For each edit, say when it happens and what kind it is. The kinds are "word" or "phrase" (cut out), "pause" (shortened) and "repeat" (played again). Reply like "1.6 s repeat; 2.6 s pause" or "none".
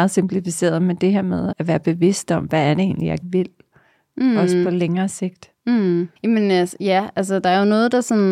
1.5 s word; 3.2 s word; 6.2 s pause